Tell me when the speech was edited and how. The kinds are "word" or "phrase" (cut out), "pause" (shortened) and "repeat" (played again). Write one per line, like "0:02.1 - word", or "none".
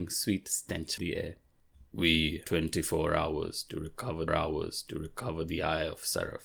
0:01.0 - word
0:02.4 - word
0:04.3 - repeat